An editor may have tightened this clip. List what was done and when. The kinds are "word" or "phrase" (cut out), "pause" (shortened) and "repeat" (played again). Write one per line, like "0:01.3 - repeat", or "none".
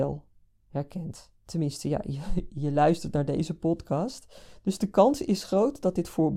0:01.4 - pause